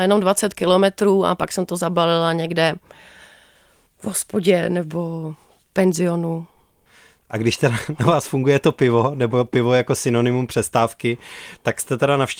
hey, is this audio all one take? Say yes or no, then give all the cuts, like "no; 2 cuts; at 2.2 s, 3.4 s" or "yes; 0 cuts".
yes; 0 cuts